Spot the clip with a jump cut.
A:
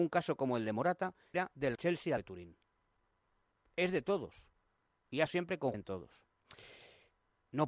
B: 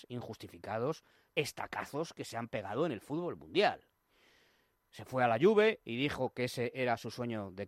A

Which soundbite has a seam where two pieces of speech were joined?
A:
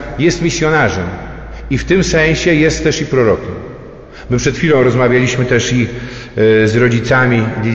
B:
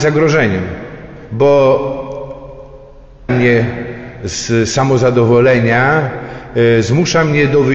B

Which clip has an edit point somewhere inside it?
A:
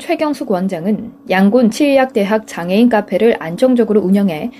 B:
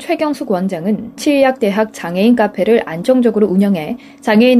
B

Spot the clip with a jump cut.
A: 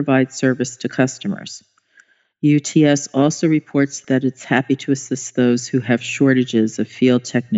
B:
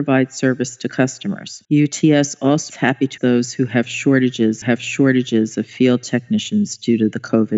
B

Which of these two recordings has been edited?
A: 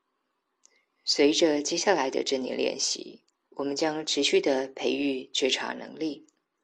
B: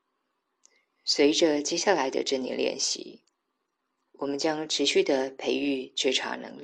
A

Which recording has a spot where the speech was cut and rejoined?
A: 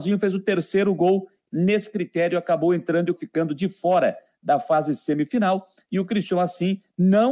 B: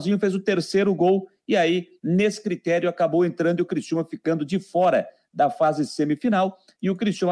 A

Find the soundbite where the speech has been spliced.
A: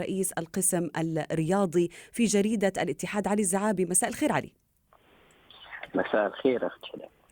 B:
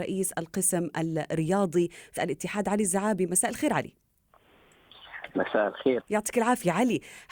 B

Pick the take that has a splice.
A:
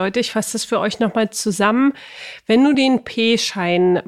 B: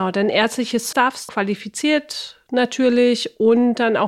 B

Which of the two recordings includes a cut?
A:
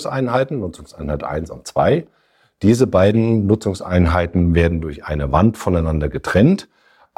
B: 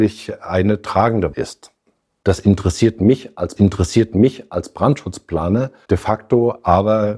B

